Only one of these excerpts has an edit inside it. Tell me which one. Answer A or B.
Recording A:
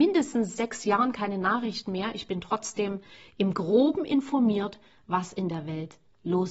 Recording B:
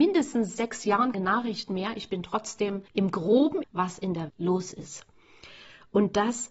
B